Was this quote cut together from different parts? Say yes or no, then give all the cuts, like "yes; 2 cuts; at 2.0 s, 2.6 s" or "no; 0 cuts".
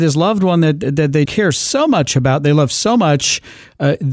yes; 1 cut; at 1.3 s